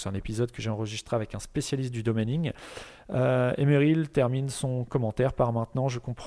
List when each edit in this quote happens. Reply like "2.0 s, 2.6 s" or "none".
none

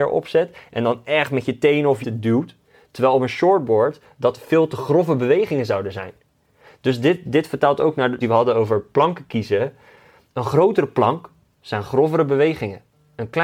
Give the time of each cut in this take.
2.0 s, 8.2 s

